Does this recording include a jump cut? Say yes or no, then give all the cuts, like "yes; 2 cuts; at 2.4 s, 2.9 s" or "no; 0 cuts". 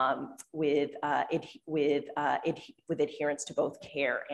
yes; 1 cut; at 1.6 s